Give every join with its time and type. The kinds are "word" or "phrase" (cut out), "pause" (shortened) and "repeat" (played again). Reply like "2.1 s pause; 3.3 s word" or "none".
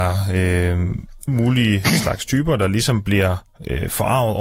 1.3 s word